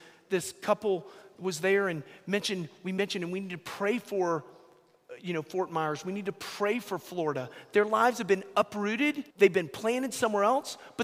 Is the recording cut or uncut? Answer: cut